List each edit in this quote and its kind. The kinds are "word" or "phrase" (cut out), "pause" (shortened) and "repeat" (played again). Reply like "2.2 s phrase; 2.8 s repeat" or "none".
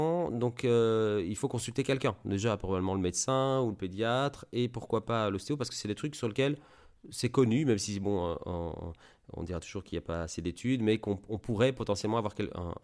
none